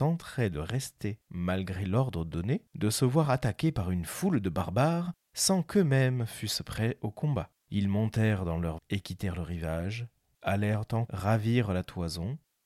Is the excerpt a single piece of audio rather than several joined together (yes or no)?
no